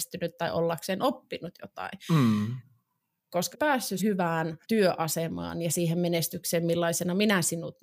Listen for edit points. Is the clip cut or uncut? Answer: cut